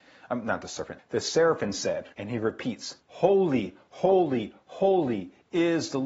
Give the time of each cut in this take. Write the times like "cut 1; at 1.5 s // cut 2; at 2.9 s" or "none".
cut 1; at 1.0 s // cut 2; at 2.1 s // cut 3; at 3.0 s